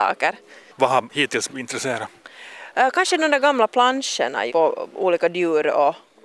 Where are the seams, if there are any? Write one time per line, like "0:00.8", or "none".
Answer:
0:01.5
0:04.5